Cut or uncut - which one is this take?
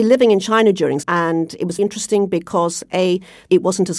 cut